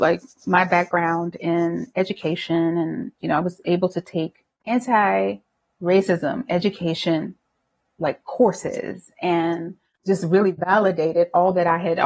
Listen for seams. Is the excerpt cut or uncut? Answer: uncut